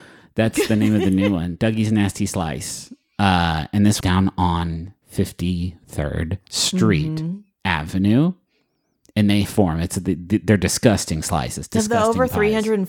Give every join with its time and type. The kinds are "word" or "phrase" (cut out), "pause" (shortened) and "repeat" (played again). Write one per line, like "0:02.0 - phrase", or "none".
0:04.0 - word
0:05.0 - pause
0:09.4 - phrase

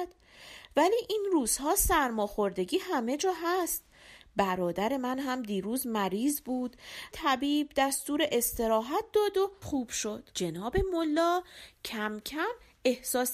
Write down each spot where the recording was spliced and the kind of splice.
0:07.1 - word
0:09.6 - word
0:10.3 - pause

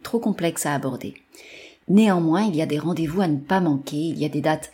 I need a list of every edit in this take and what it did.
none

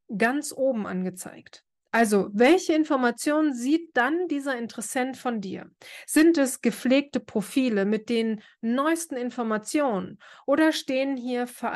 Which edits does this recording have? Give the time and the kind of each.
none

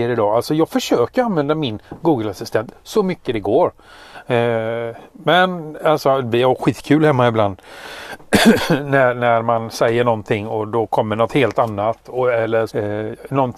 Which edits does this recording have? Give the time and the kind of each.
0:12.7 - word

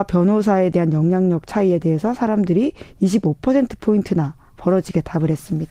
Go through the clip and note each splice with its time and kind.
none

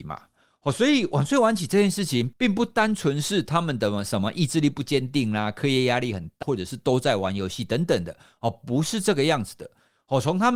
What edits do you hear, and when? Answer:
0:06.4 - word

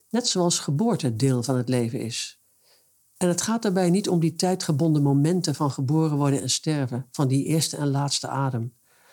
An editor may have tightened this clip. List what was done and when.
none

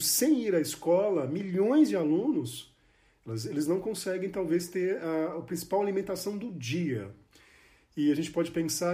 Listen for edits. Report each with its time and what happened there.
none

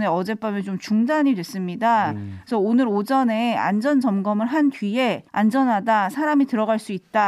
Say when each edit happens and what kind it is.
0:05.3 - pause

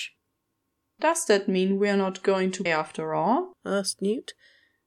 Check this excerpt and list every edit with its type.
0:02.7 - word
0:03.6 - pause

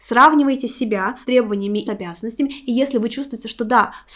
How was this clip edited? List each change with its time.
0:01.2 - phrase
0:01.9 - word

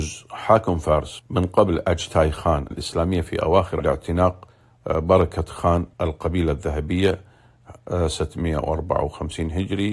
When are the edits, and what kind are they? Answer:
0:01.2 - phrase
0:02.7 - word
0:03.8 - phrase
0:05.9 - pause

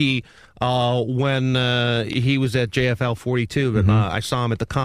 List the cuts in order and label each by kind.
none

